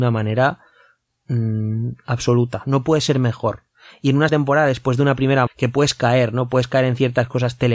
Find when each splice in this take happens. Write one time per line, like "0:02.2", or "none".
0:04.3
0:05.5